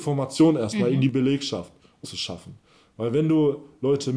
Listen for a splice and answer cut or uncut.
cut